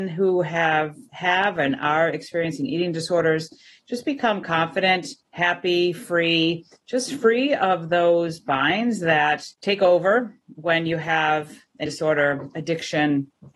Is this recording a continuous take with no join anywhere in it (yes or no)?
no